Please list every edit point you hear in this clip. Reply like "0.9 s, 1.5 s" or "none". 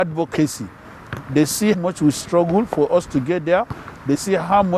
1.7 s